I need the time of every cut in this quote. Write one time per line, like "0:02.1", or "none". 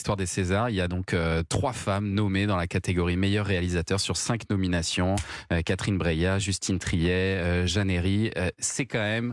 none